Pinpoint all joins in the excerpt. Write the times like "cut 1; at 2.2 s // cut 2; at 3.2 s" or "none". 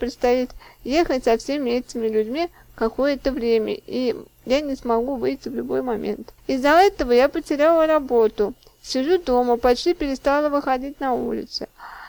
cut 1; at 6.4 s